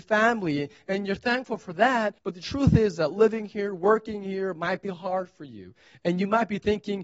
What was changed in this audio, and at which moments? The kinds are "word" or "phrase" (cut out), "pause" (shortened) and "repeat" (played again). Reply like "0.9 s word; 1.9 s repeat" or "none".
2.2 s pause; 4.8 s word